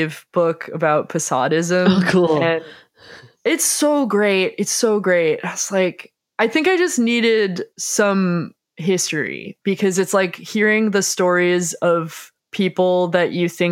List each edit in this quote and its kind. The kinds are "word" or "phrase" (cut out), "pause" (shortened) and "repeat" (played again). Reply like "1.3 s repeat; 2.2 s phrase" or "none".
7.7 s pause; 12.4 s pause